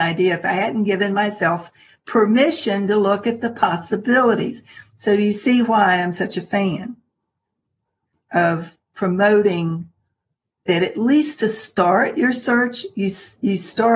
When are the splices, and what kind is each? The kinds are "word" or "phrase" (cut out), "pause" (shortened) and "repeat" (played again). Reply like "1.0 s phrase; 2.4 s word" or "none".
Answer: none

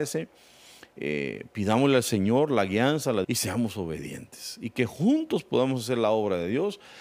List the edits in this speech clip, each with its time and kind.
3.2 s word

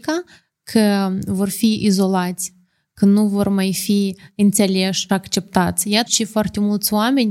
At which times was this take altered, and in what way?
5.1 s word; 6.1 s word

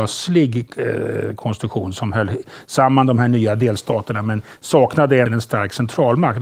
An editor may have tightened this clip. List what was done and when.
5.3 s word

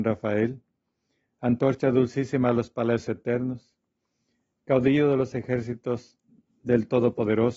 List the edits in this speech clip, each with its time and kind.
none

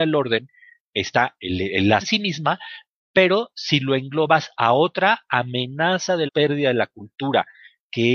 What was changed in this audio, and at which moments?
2.0 s word; 6.3 s word

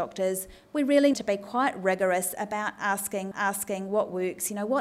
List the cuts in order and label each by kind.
1.1 s word; 3.3 s repeat

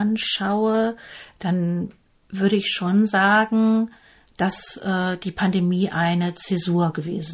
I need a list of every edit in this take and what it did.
none

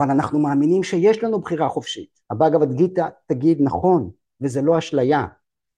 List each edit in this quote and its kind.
2.2 s pause

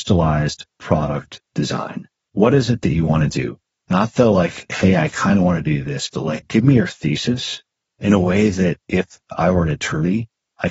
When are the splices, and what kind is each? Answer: none

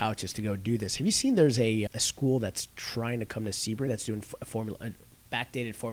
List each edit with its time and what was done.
1.9 s word; 3.9 s word

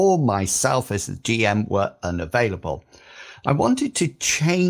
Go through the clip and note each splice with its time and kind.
none

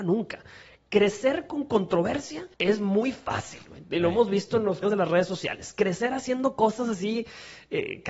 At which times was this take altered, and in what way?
2.5 s pause; 4.8 s word

